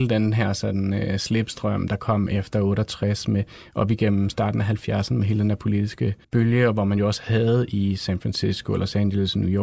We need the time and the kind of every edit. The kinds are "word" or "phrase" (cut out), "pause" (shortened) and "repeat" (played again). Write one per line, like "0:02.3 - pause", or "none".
0:06.2 - pause